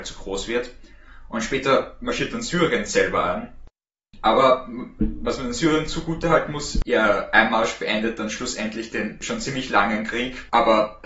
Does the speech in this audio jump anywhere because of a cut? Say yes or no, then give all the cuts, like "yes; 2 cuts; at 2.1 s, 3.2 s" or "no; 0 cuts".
no; 0 cuts